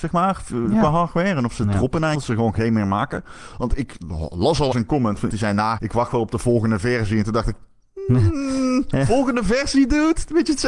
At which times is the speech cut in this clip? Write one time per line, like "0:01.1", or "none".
0:02.1
0:04.7
0:05.3
0:05.8